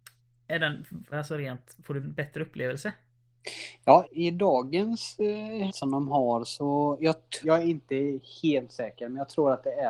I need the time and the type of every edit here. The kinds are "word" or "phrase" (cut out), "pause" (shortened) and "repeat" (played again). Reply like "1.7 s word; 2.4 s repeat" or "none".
1.1 s word; 2.0 s word; 4.0 s word; 5.7 s word; 7.4 s word